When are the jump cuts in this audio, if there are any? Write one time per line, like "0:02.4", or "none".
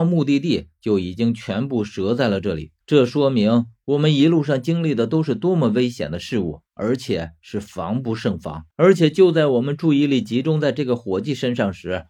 0:02.8
0:06.7
0:08.7

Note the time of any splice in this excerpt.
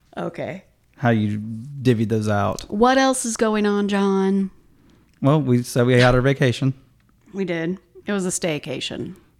none

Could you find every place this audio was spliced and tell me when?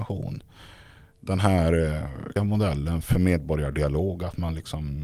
0:02.4
0:03.0

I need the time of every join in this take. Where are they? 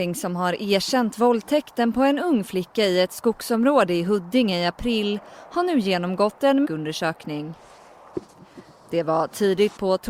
0:06.6

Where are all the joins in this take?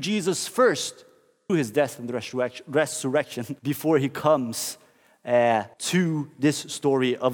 0:01.5
0:03.6
0:05.7

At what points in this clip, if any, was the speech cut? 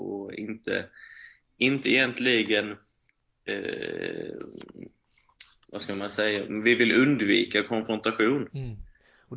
none

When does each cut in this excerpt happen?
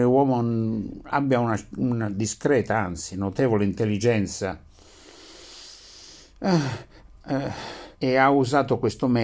0:07.9

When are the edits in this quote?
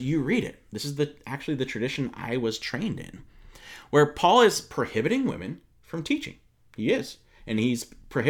none

